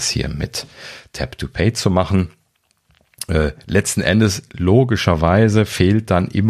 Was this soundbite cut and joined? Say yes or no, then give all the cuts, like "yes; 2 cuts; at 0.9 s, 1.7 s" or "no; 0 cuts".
no; 0 cuts